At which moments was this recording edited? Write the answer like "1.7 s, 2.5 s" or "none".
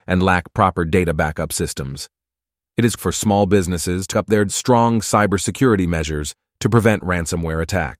3.0 s, 4.1 s, 4.5 s

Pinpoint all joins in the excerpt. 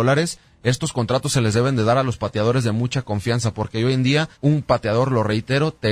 4.3 s

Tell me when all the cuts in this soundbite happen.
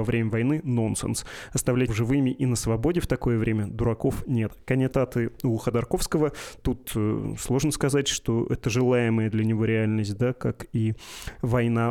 1.9 s, 4.9 s

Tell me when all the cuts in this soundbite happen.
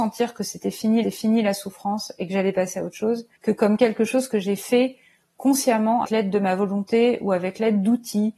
1.0 s, 3.4 s, 6.0 s

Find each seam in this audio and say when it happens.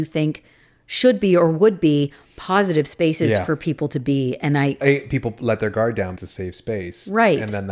4.8 s, 6.2 s

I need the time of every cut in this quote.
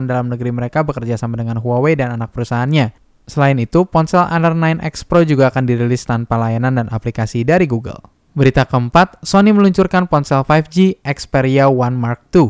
8.3 s

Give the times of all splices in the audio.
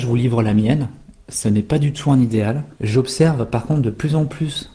2.8 s

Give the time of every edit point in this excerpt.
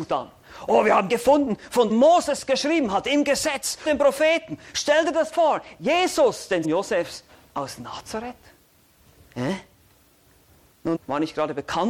1.1 s, 1.9 s, 3.8 s, 5.3 s, 6.6 s, 10.9 s

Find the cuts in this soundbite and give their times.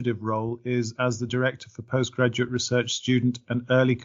none

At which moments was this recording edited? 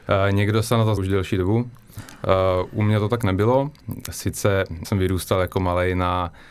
1.0 s, 4.8 s

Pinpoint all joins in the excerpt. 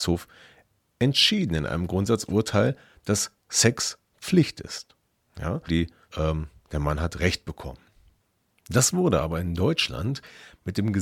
5.7 s, 6.1 s

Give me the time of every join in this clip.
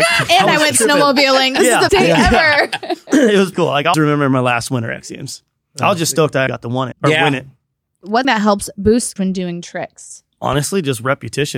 1.9 s, 3.5 s, 3.9 s, 6.5 s, 6.9 s, 8.2 s, 9.2 s, 10.3 s

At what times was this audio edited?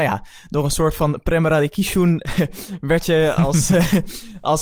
2.3 s

